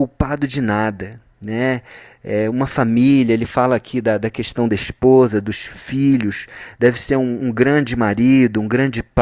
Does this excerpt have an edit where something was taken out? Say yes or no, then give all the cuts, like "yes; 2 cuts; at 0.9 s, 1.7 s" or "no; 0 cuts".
no; 0 cuts